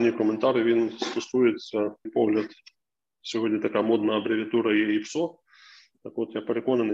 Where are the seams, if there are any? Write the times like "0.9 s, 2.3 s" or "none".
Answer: 2.0 s